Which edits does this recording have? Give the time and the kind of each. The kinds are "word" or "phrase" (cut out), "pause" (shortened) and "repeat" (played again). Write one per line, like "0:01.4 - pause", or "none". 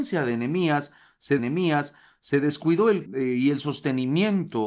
0:01.4 - repeat
0:03.1 - word